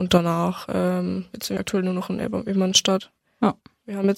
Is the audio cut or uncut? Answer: cut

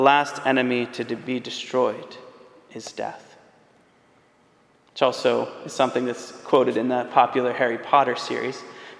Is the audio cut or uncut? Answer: uncut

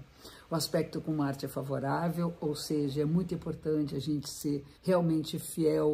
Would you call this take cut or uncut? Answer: cut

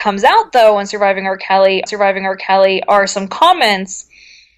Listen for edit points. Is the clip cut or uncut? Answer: cut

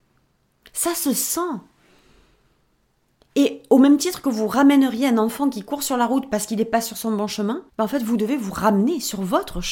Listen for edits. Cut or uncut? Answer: cut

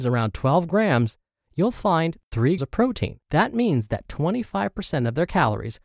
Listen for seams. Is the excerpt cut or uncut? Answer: cut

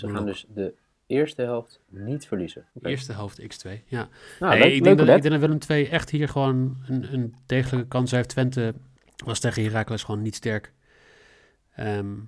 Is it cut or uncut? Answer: cut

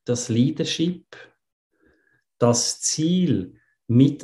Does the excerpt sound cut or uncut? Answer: uncut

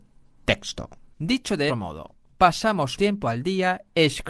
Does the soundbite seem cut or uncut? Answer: cut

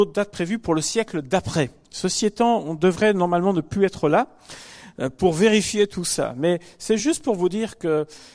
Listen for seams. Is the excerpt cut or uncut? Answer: uncut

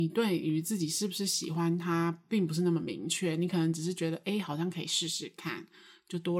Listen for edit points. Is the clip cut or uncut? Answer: uncut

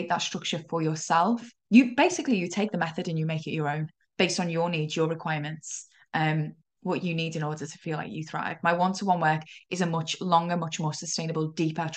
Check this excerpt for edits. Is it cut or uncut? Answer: cut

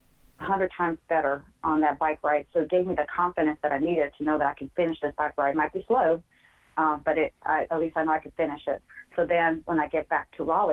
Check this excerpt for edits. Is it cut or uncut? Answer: uncut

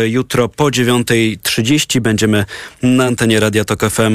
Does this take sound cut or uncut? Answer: uncut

